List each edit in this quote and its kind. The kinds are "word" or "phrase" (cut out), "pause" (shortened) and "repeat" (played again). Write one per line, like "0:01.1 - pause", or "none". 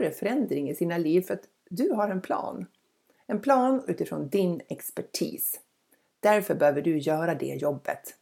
0:03.9 - word